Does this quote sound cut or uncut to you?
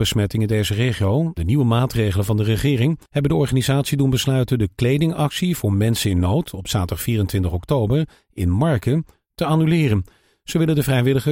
cut